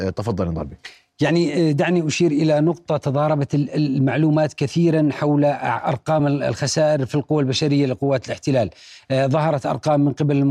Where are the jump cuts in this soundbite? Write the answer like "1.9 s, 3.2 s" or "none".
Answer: none